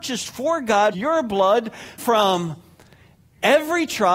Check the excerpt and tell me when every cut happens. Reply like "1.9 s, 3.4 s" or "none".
0.9 s, 2.0 s